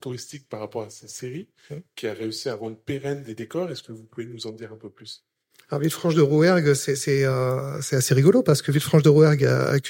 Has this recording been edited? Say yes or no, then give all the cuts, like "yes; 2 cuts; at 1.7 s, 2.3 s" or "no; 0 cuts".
no; 0 cuts